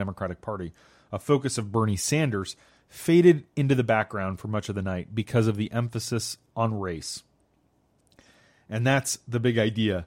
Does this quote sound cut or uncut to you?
uncut